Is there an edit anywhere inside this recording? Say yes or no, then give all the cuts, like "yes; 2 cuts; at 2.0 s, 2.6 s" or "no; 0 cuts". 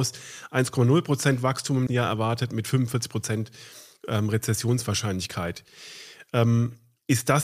yes; 1 cut; at 1.9 s